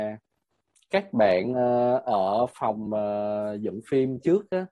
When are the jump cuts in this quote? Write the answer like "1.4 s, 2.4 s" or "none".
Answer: none